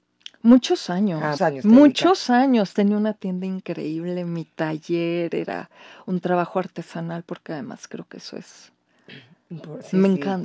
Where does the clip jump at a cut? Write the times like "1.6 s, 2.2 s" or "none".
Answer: 1.4 s